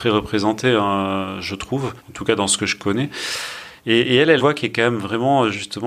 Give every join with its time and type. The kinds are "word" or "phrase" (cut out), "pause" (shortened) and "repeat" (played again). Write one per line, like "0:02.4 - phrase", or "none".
0:02.0 - pause
0:03.8 - pause
0:04.4 - phrase